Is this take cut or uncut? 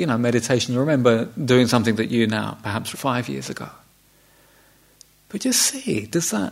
cut